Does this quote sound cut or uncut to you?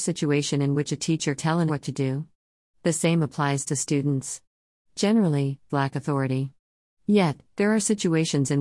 cut